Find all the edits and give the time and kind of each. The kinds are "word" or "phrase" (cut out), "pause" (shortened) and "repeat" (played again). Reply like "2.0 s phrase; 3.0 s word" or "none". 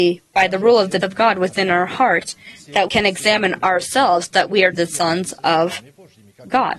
1.0 s word; 2.9 s word; 4.7 s word